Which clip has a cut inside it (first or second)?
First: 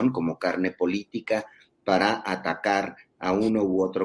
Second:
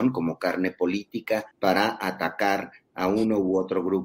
second